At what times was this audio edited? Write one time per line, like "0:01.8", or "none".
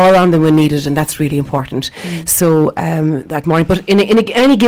0:03.4